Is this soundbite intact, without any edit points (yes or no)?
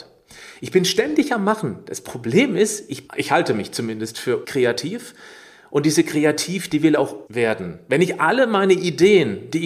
no